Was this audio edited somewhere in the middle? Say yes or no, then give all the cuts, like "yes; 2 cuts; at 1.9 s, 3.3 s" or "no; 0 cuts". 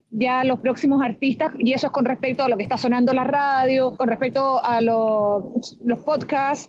no; 0 cuts